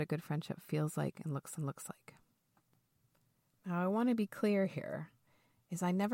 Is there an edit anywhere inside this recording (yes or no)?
yes